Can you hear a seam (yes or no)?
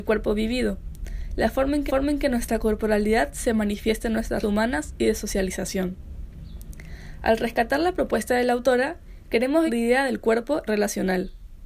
yes